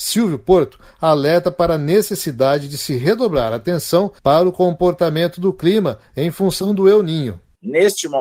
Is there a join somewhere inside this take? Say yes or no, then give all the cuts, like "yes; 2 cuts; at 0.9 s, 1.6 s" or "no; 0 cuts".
yes; 1 cut; at 4.2 s